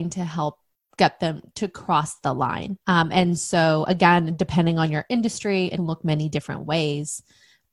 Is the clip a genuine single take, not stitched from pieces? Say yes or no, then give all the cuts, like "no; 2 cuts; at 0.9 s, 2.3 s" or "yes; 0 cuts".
no; 2 cuts; at 2.8 s, 5.8 s